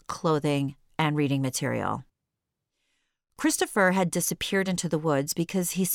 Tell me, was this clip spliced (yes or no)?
no